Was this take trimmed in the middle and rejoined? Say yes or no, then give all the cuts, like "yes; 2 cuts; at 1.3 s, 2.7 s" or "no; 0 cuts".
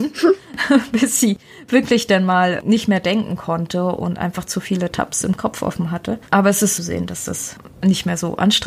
yes; 2 cuts; at 6.3 s, 6.8 s